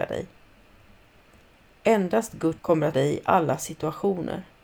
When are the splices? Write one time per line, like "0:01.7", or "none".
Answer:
0:02.6
0:02.9

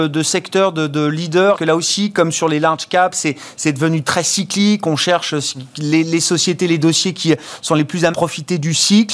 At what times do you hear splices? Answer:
0:01.5
0:08.1

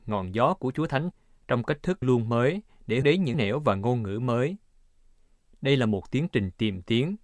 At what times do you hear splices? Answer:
0:01.1
0:02.0
0:03.0
0:03.3

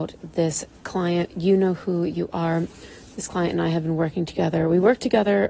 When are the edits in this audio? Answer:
none

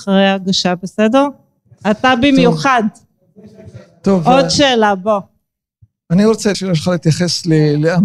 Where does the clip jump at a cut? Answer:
0:06.5

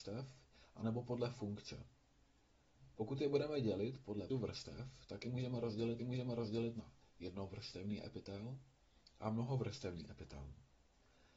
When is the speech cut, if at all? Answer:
0:04.3
0:06.0

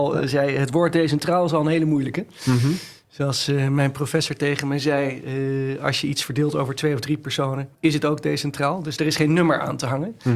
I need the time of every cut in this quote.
0:07.7

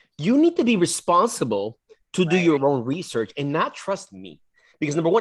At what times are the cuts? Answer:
none

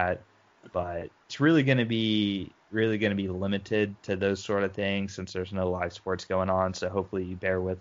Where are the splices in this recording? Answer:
none

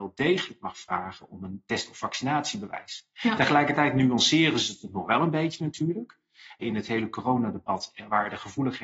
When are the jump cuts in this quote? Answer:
0:06.6

